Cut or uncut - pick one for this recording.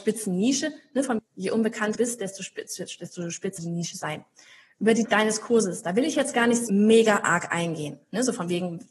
cut